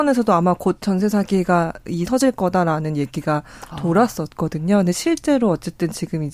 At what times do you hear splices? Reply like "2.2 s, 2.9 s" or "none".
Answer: 2.1 s